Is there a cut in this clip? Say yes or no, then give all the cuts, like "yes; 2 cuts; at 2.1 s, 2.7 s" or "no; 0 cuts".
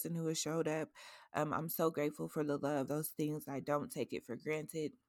yes; 1 cut; at 2.9 s